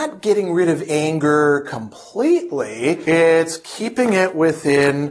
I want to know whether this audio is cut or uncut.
uncut